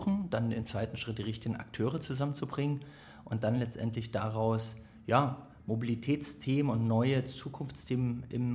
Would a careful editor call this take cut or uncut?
uncut